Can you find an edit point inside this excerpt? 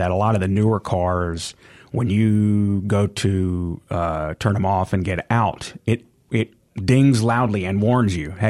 no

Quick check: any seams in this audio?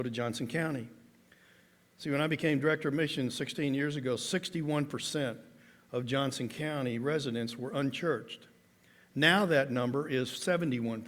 no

